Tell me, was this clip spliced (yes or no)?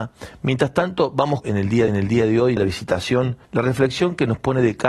yes